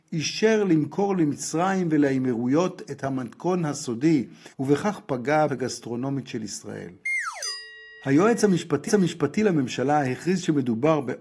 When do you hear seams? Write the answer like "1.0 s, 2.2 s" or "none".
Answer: 4.5 s, 5.5 s, 8.9 s